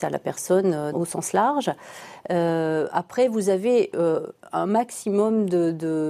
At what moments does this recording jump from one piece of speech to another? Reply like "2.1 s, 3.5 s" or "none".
0.9 s